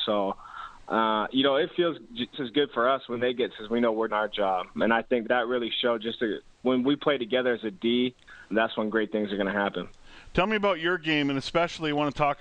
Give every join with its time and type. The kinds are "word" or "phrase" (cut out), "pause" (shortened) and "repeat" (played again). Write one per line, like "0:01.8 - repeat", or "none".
0:02.3 - word
0:03.5 - word
0:04.1 - word
0:04.8 - word
0:05.2 - word
0:08.5 - word